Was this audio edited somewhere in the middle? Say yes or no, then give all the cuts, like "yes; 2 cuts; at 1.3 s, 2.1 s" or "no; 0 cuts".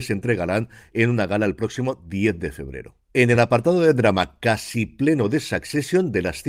no; 0 cuts